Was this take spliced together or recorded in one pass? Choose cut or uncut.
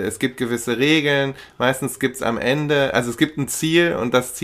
uncut